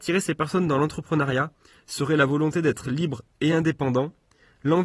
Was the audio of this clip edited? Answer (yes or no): no